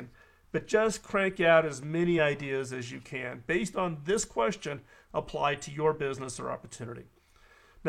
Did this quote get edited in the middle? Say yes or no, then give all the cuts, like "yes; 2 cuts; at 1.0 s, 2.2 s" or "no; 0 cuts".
no; 0 cuts